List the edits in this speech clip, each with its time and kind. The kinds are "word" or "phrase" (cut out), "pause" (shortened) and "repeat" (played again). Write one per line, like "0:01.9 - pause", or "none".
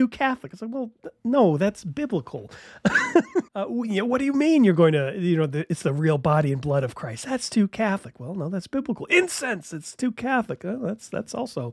0:03.5 - pause